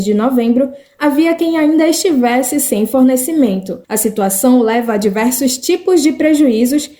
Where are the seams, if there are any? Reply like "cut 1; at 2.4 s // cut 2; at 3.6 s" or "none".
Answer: cut 1; at 3.8 s